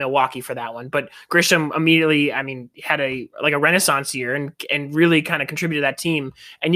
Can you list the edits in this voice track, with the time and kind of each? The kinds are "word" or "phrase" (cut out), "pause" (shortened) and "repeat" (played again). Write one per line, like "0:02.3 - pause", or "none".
0:03.3 - pause